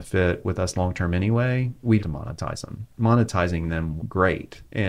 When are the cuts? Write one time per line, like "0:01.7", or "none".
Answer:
0:02.0
0:02.9
0:04.0